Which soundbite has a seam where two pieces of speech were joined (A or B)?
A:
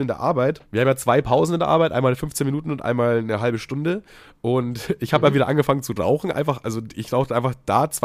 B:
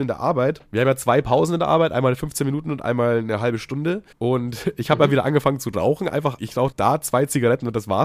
B